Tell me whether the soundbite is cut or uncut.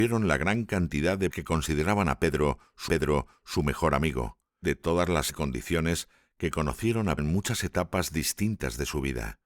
cut